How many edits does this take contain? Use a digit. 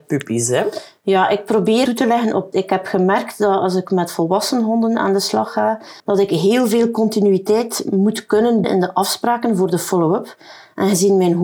4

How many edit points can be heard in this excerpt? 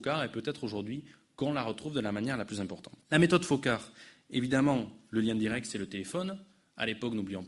1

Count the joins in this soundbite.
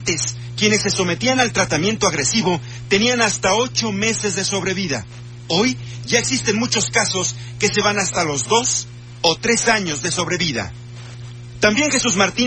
0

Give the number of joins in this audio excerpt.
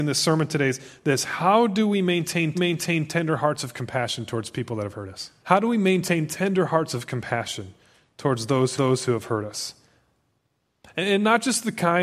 3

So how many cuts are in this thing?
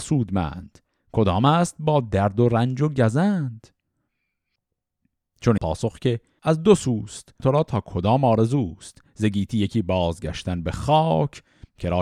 3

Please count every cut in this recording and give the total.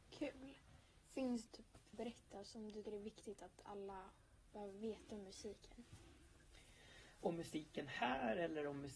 3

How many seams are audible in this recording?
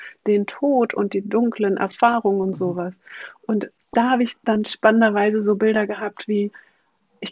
0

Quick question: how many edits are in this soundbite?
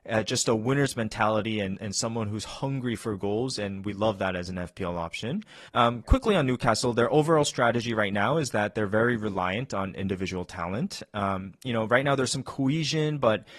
1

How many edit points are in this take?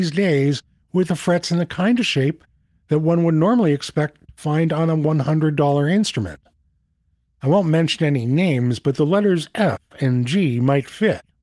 0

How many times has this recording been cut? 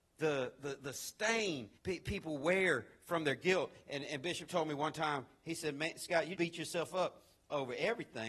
2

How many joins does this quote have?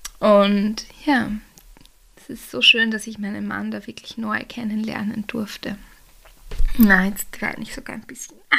0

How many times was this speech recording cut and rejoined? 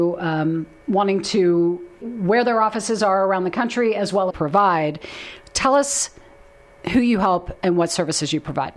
2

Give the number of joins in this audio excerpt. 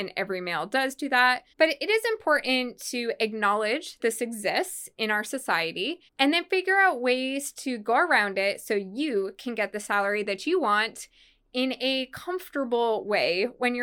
3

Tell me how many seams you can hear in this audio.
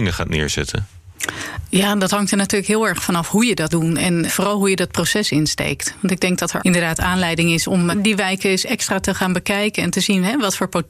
4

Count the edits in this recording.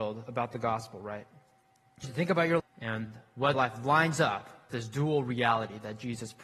4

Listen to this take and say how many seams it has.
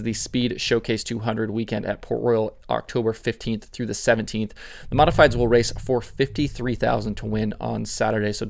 0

